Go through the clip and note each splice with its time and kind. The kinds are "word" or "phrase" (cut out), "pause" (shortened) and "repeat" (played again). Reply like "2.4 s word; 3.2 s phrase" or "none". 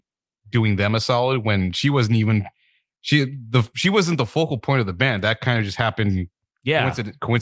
none